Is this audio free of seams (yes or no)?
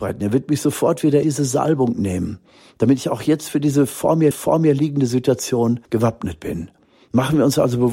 no